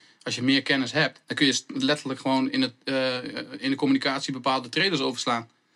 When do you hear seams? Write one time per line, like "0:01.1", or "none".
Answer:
0:01.2